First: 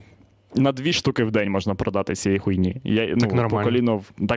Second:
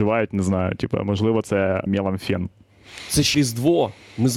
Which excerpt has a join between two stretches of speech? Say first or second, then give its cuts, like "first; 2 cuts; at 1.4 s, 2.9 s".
second; 2 cuts; at 1.9 s, 3.3 s